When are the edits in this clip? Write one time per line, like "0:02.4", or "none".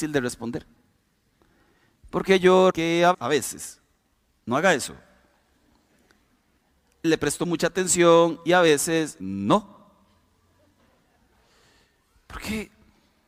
0:02.7
0:03.1
0:07.0
0:09.2